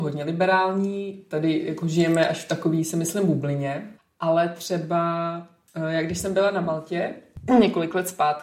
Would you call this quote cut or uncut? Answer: uncut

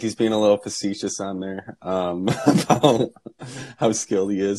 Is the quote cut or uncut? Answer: uncut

